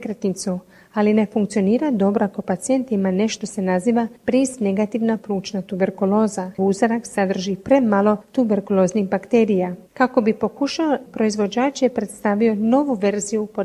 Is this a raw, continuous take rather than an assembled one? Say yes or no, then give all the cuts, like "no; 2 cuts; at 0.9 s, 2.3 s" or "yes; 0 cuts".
no; 5 cuts; at 3.4 s, 4.2 s, 6.6 s, 9.9 s, 11.1 s